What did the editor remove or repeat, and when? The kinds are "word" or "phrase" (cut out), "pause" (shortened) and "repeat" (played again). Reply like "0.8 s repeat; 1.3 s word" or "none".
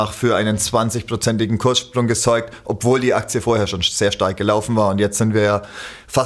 none